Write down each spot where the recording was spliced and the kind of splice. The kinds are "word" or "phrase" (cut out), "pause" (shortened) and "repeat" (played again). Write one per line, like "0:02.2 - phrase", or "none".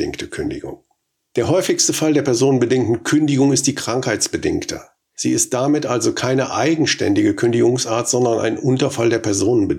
none